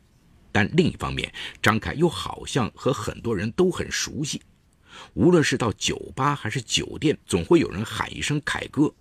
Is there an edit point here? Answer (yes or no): yes